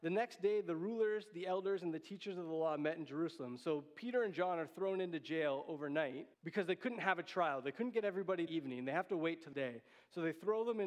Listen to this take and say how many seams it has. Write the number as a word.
three